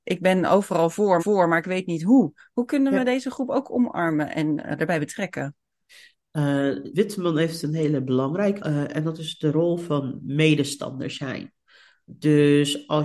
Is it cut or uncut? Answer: cut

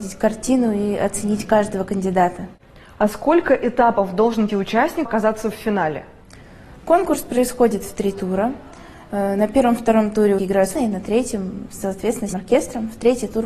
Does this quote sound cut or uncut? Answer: cut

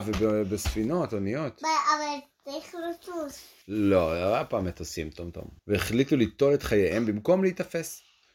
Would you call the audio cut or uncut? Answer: cut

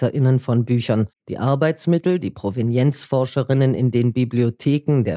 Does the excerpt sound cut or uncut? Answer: cut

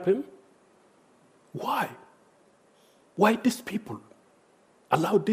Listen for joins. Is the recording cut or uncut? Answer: uncut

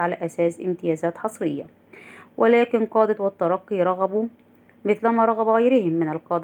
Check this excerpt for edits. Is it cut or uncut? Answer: cut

